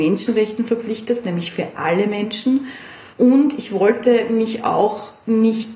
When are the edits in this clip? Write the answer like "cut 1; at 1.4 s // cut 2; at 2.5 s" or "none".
cut 1; at 1.2 s // cut 2; at 3.1 s

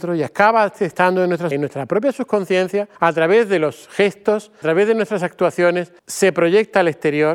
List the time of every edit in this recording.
cut 1; at 1.5 s // cut 2; at 3.0 s // cut 3; at 4.6 s // cut 4; at 6.0 s

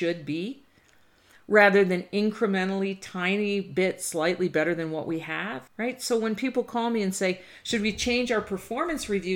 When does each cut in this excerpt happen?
cut 1; at 5.7 s

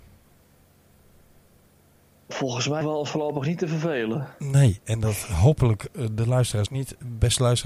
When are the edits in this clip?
cut 1; at 2.8 s // cut 2; at 6.7 s

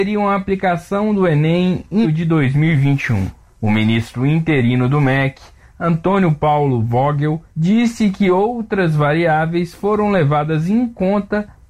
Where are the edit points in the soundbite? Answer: cut 1; at 2.0 s // cut 2; at 7.5 s

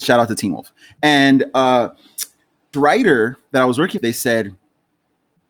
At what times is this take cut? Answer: cut 1; at 2.7 s // cut 2; at 4.0 s

